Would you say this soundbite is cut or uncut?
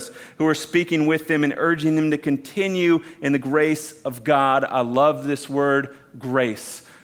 uncut